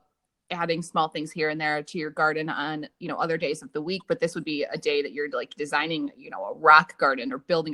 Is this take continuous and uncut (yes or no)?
yes